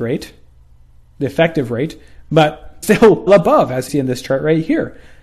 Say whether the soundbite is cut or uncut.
cut